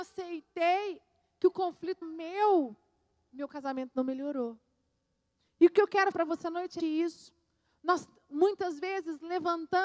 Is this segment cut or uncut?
cut